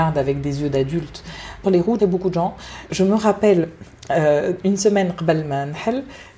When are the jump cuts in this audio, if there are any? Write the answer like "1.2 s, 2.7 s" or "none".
1.6 s, 2.0 s, 2.9 s

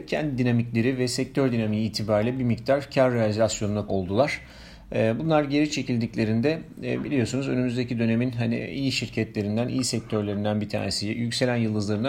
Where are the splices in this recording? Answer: 3.9 s

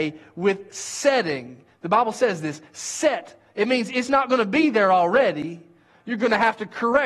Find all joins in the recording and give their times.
none

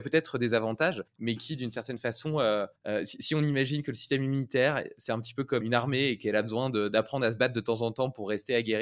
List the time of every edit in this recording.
1.1 s, 2.8 s, 5.6 s

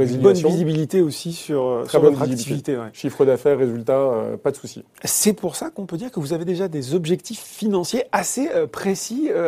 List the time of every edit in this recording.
none

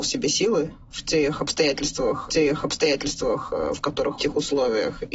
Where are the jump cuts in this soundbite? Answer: 2.3 s, 4.2 s

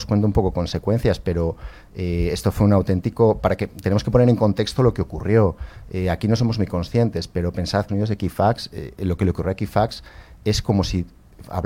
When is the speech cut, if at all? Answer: 7.9 s

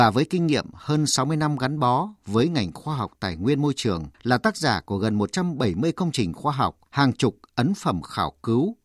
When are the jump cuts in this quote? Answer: 4.1 s, 6.9 s

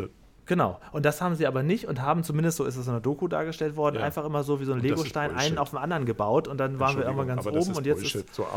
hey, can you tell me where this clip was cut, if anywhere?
none

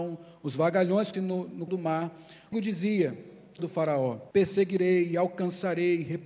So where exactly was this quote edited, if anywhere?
1.1 s, 1.7 s, 2.5 s, 3.6 s, 4.3 s

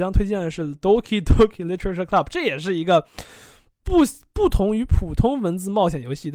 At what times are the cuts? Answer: none

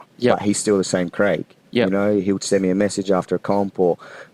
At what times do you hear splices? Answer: none

